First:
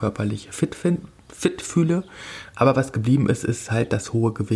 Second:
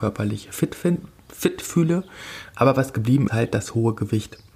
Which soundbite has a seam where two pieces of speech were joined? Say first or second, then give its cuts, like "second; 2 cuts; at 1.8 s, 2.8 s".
second; 1 cut; at 3.3 s